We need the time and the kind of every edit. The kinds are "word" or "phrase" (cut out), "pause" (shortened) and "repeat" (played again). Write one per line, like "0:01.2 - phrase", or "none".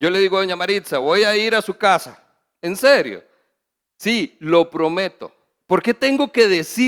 none